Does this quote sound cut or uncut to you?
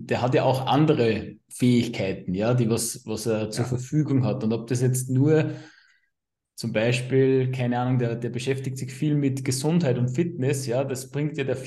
uncut